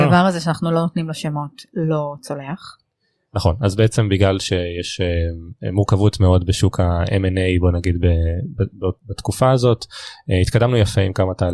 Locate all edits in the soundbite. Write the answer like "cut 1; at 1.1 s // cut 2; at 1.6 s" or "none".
none

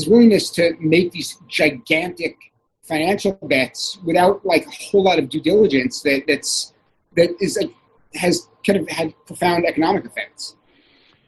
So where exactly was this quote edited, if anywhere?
none

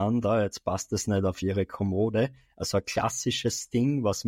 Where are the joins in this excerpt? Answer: none

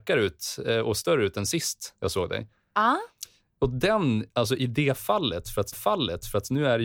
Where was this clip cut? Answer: cut 1; at 5.7 s

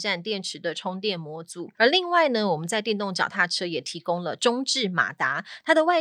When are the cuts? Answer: cut 1; at 1.7 s

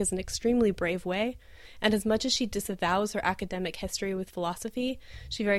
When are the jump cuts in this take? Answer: none

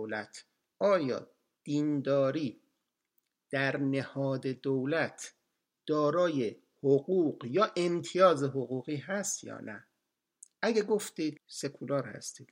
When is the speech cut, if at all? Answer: cut 1; at 11.4 s

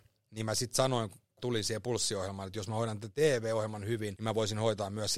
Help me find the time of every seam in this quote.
cut 1; at 1.4 s // cut 2; at 4.2 s

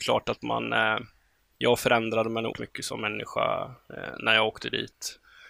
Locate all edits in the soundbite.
cut 1; at 2.5 s

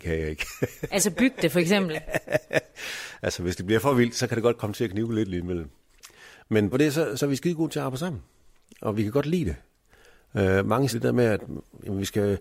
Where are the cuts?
cut 1; at 6.7 s // cut 2; at 7.2 s // cut 3; at 10.9 s

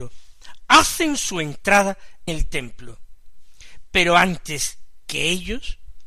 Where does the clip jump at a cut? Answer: cut 1; at 2.3 s

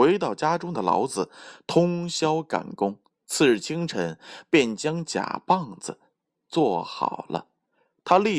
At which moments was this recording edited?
cut 1; at 3.0 s

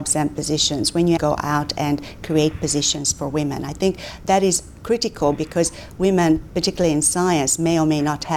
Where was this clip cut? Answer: cut 1; at 1.2 s

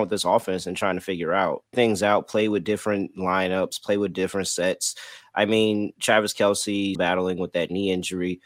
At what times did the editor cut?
cut 1; at 1.7 s // cut 2; at 7.0 s

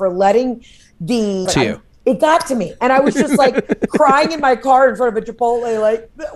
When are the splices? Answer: cut 1; at 1.5 s

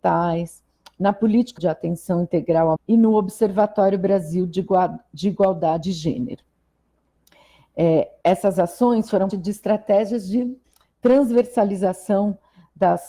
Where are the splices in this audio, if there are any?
cut 1; at 1.6 s // cut 2; at 2.8 s // cut 3; at 5.8 s // cut 4; at 9.3 s

